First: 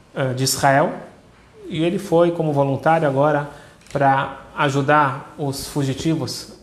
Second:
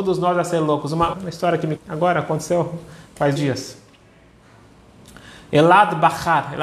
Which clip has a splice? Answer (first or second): second